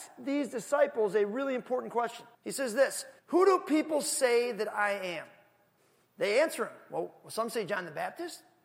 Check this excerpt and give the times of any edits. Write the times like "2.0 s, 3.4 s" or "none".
2.3 s, 3.2 s, 5.8 s